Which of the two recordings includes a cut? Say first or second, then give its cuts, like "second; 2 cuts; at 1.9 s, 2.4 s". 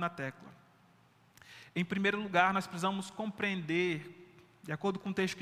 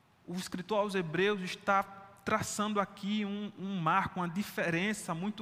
second; 1 cut; at 2.2 s